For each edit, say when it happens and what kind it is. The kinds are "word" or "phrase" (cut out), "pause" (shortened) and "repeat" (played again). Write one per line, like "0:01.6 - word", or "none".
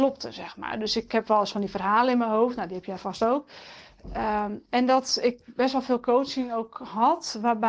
none